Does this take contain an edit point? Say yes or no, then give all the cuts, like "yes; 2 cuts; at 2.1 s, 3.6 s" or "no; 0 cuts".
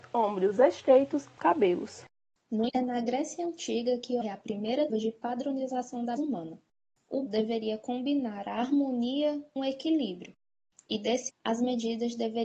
yes; 8 cuts; at 1.4 s, 2.7 s, 4.2 s, 4.9 s, 6.2 s, 7.3 s, 9.6 s, 11.3 s